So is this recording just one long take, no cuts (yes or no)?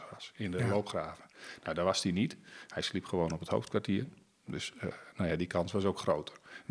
yes